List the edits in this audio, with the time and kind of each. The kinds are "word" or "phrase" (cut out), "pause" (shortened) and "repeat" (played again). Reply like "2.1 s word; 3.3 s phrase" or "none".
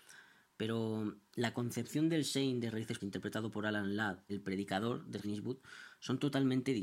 3.0 s word; 4.3 s word; 5.2 s phrase

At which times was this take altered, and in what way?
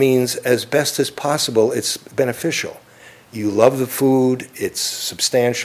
none

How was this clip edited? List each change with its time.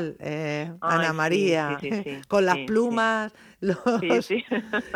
1.8 s word

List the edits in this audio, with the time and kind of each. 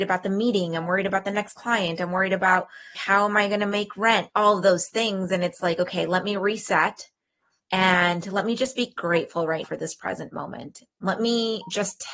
2.9 s word; 4.3 s word; 9.6 s word

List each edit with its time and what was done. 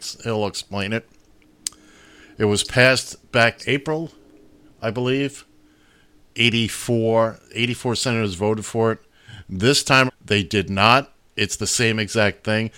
3.6 s word; 10.1 s word

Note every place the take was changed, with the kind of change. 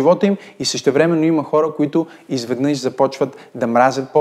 none

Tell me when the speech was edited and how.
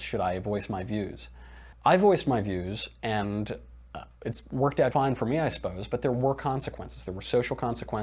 1.7 s pause; 4.9 s word

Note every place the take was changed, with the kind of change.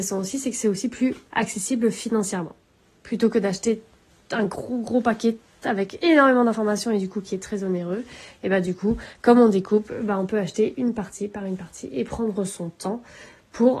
none

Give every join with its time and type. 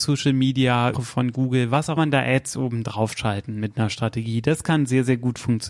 0.9 s phrase; 2.0 s phrase

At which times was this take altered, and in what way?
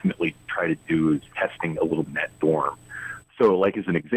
1.3 s word; 1.7 s word; 2.1 s phrase

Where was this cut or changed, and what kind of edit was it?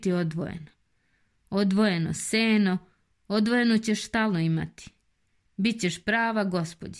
none

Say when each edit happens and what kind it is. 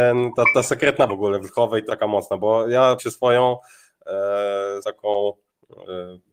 1.1 s word; 1.9 s phrase; 3.0 s word; 4.8 s word

